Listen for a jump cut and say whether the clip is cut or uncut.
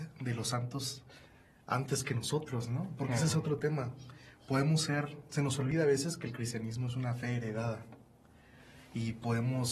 uncut